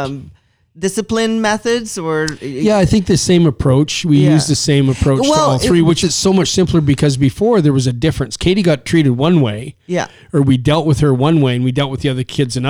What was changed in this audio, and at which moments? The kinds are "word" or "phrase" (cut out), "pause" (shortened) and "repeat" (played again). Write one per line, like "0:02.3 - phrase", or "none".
0:06.0 - word